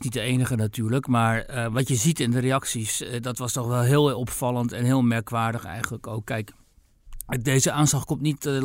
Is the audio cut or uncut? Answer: uncut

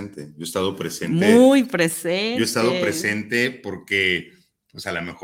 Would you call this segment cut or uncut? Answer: uncut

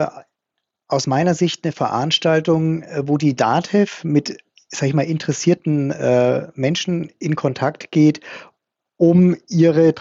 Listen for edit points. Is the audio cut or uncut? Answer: uncut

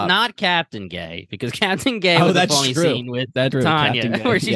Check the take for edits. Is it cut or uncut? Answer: cut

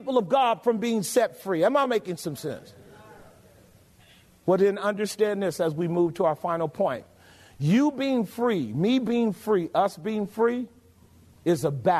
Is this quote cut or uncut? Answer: uncut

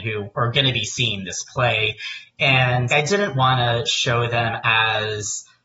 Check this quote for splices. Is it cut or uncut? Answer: cut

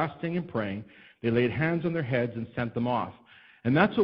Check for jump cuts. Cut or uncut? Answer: uncut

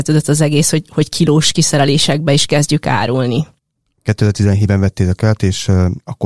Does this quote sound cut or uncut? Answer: uncut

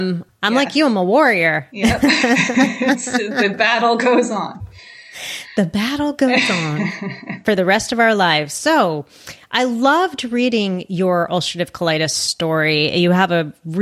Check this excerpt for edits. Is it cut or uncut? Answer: uncut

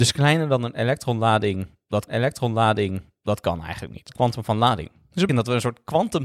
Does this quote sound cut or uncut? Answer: cut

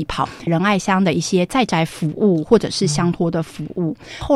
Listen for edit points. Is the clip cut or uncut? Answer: uncut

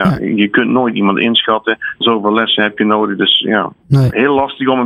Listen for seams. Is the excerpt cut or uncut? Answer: cut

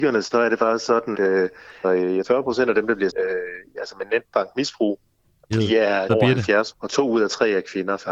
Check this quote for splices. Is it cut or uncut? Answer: cut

